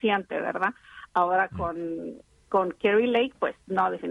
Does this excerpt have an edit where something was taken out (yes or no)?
no